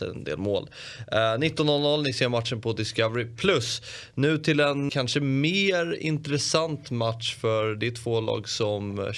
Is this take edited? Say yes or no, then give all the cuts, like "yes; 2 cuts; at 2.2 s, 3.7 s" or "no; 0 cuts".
yes; 1 cut; at 4.9 s